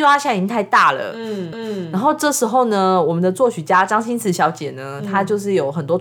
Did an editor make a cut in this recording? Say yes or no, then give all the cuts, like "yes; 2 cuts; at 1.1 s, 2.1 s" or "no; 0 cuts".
yes; 1 cut; at 1.5 s